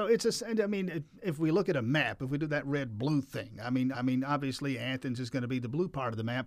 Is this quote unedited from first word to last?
no; 1 cut; at 3.9 s

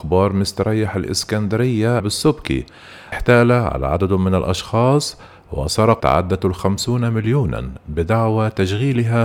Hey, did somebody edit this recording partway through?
yes; 3 cuts; at 2.0 s, 3.1 s, 6.0 s

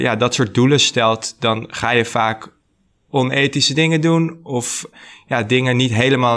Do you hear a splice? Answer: no; 0 cuts

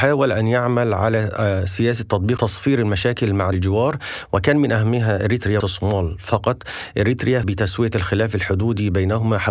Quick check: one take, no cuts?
no; 4 cuts; at 2.4 s, 3.5 s, 5.6 s, 7.4 s

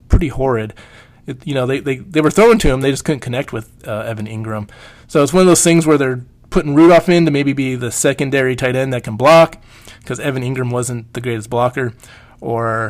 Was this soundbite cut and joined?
no; 0 cuts

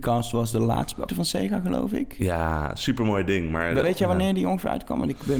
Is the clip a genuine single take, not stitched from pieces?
no; 2 cuts; at 1.1 s, 3.8 s

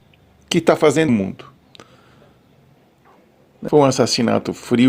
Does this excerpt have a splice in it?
yes; 1 cut; at 1.1 s

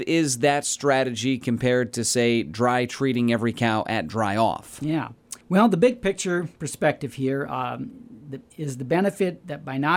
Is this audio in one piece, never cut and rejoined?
no; 1 cut; at 5.4 s

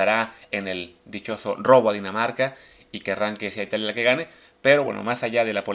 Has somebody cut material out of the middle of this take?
no; 0 cuts

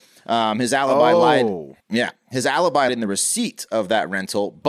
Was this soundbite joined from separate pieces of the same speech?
yes; 2 cuts; at 1.8 s, 2.9 s

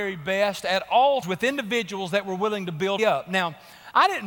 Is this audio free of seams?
no; 2 cuts; at 1.2 s, 3.0 s

